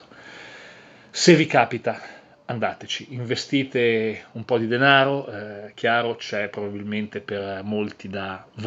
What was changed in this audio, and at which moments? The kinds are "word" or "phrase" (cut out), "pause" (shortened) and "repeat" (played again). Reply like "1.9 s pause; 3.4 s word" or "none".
none